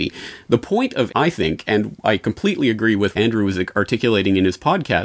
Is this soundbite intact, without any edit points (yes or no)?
no